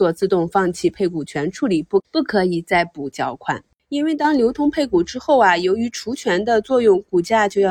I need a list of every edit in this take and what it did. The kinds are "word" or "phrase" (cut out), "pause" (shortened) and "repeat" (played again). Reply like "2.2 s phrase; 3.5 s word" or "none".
none